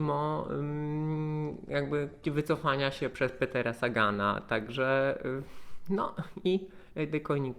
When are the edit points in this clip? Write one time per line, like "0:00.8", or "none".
0:02.2
0:03.1